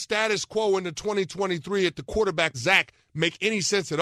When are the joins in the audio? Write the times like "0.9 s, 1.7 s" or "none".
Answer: 2.5 s

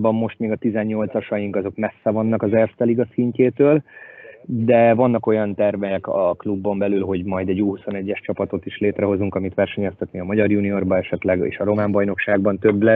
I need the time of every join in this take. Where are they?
4.3 s

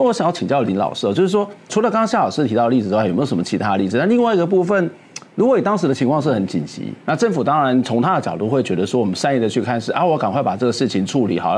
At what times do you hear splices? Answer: 1.7 s, 7.0 s

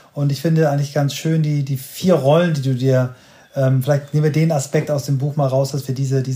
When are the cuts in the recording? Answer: none

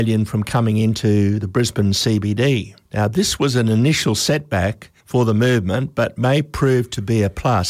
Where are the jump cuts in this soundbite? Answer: 2.8 s, 5.0 s

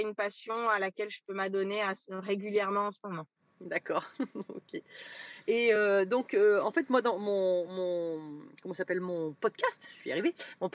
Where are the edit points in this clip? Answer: none

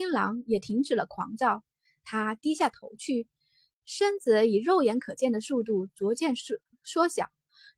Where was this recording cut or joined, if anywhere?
none

